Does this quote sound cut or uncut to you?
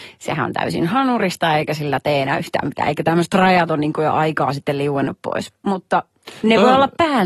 uncut